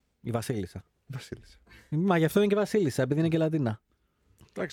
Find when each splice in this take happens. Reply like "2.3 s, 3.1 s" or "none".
none